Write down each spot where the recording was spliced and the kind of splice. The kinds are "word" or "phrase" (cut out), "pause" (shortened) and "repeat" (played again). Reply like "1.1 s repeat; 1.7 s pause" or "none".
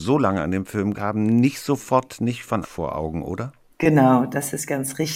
0.9 s word; 2.6 s phrase; 3.7 s pause